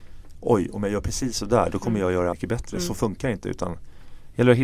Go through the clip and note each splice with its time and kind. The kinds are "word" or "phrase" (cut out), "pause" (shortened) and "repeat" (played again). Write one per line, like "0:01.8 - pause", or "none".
0:02.3 - word